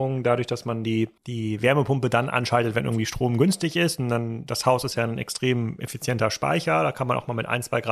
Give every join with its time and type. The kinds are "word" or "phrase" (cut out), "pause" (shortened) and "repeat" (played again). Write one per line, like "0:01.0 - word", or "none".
0:01.2 - pause